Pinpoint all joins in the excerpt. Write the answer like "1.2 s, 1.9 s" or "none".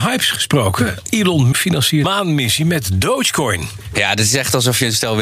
1.5 s, 2.0 s